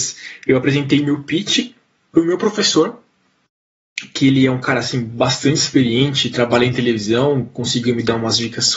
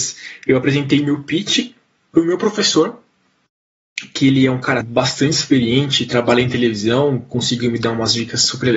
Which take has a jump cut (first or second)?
second